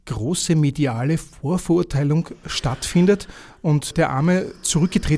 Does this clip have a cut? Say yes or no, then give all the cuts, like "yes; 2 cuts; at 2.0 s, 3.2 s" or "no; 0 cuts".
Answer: yes; 1 cut; at 3.9 s